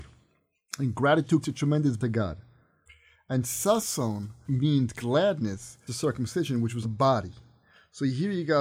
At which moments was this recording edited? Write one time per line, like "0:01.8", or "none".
0:01.4
0:02.0
0:04.4
0:05.9
0:06.8